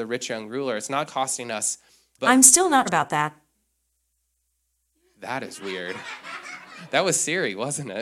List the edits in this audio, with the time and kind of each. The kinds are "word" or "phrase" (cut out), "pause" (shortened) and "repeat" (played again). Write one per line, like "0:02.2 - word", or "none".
0:01.1 - word
0:02.2 - phrase
0:02.9 - word
0:05.6 - word